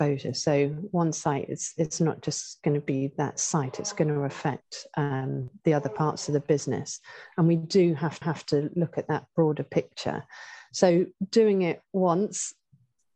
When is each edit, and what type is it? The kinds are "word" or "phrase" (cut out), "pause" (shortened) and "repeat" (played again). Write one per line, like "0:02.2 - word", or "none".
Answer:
0:08.2 - repeat